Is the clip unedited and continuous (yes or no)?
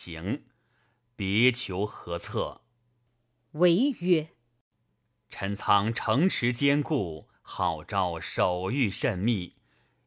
yes